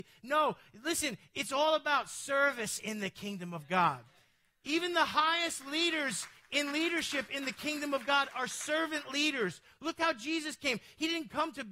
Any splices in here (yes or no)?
no